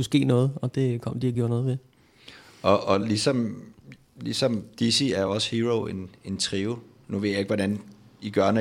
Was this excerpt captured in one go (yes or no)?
yes